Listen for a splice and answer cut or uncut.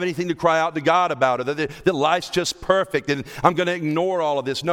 uncut